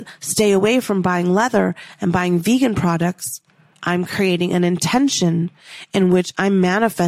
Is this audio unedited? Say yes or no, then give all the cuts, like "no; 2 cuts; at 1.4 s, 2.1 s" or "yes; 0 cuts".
yes; 0 cuts